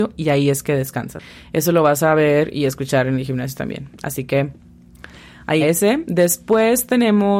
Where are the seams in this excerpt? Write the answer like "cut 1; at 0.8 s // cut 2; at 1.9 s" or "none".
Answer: cut 1; at 5.6 s